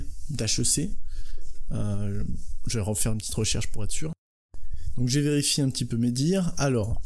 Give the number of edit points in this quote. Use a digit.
0